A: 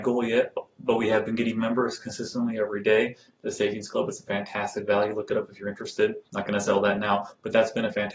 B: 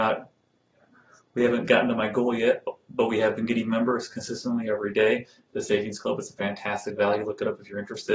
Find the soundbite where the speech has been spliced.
A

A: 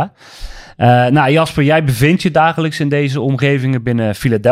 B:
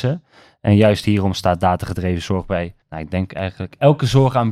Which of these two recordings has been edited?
B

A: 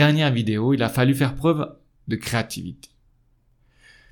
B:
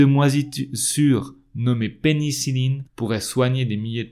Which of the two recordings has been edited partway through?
B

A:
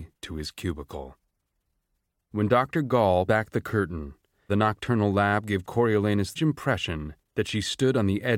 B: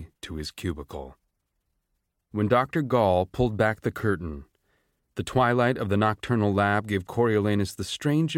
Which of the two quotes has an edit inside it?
A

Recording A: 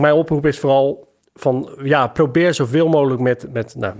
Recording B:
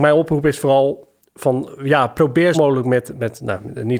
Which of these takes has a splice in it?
B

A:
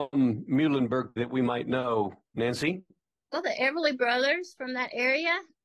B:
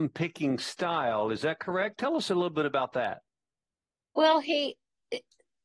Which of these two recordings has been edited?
A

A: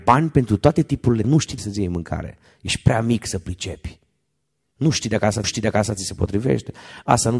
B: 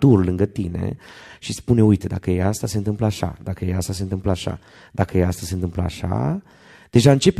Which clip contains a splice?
A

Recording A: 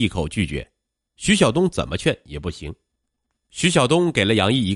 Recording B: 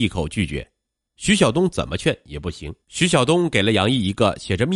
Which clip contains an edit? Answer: B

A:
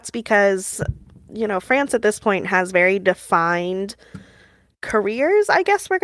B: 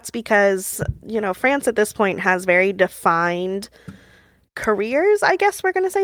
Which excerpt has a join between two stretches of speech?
B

